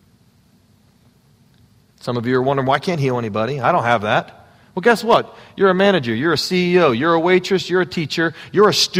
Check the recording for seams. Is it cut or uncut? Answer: uncut